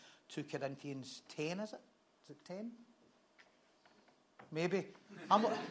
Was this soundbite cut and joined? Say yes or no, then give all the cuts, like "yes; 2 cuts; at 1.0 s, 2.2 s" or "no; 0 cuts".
no; 0 cuts